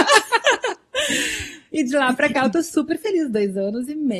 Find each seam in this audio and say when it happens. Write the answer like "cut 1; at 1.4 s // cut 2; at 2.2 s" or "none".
none